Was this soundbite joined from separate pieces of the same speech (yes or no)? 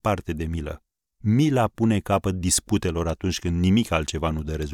yes